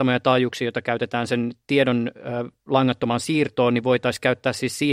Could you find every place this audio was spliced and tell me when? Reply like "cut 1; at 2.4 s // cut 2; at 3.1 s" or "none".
none